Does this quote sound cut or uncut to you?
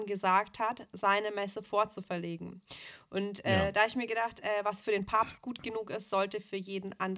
uncut